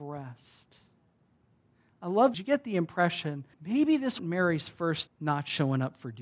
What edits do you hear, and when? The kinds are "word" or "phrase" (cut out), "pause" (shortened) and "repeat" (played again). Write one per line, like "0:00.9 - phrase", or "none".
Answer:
0:02.3 - phrase
0:03.5 - pause
0:04.2 - word
0:05.1 - word